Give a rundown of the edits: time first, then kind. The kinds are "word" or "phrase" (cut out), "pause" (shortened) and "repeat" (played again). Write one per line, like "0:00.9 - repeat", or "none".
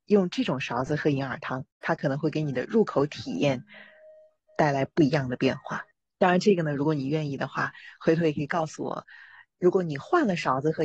0:01.7 - pause
0:05.9 - pause